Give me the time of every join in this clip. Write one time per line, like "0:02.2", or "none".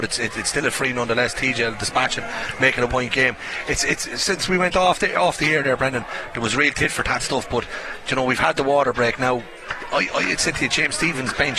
0:02.9